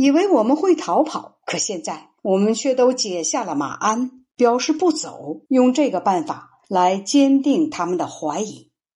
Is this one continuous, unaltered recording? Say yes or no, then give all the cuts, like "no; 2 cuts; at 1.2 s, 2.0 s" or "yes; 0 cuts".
no; 5 cuts; at 1.4 s, 2.2 s, 4.3 s, 5.5 s, 6.6 s